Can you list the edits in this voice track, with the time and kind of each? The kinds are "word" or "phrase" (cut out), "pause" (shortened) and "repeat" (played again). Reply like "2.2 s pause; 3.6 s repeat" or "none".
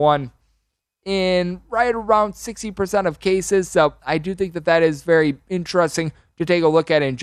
none